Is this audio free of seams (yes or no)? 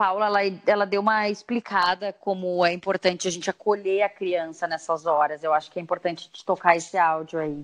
yes